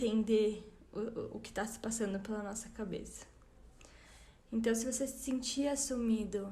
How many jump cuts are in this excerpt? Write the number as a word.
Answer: zero